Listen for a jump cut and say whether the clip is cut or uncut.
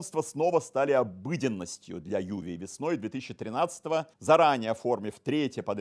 cut